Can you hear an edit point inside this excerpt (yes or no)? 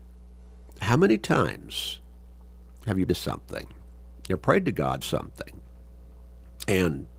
yes